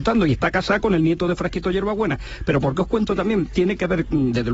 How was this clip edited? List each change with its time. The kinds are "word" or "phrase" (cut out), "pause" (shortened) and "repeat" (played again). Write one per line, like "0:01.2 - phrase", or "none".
0:03.1 - word